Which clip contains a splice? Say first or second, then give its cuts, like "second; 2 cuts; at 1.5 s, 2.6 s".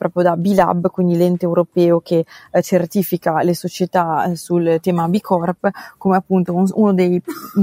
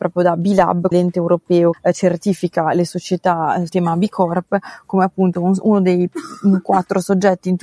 second; 3 cuts; at 0.9 s, 1.7 s, 3.7 s